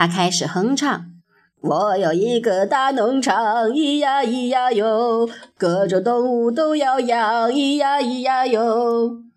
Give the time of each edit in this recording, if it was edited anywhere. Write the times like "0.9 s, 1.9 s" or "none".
1.2 s